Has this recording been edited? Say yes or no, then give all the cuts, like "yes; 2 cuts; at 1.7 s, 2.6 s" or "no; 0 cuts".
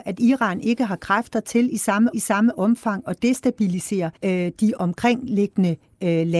yes; 3 cuts; at 2.1 s, 4.2 s, 4.8 s